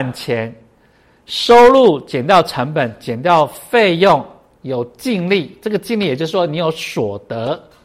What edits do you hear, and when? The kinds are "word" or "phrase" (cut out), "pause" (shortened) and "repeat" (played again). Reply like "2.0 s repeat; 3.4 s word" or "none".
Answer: none

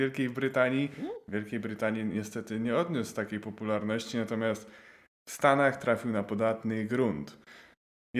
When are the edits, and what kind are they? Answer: none

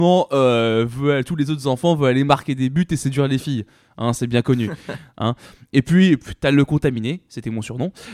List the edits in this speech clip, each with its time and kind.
none

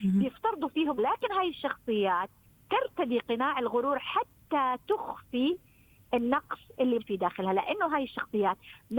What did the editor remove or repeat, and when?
1.0 s word; 2.4 s pause; 7.0 s word

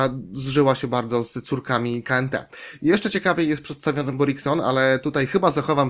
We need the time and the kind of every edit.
none

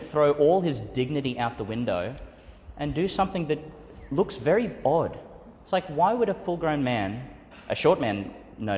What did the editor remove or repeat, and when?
5.6 s pause

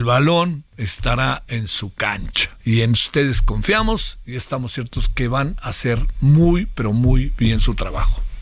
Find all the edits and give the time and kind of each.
2.6 s pause

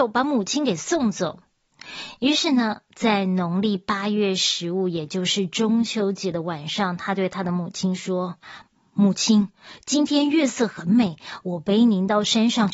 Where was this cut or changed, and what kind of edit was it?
8.4 s pause

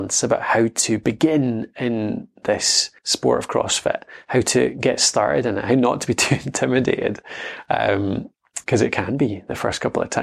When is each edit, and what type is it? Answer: 3.0 s pause; 8.6 s pause

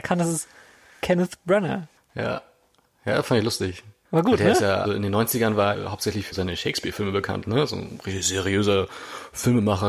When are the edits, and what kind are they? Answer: 4.8 s word; 5.7 s word; 6.3 s word

